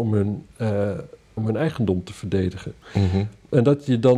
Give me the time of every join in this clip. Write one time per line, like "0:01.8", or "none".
0:01.4